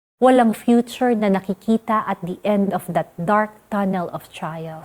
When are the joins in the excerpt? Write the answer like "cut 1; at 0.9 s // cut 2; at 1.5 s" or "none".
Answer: none